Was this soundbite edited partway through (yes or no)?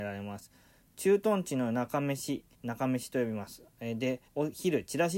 yes